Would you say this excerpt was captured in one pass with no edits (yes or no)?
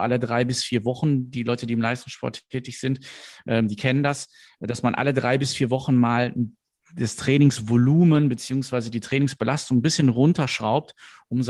yes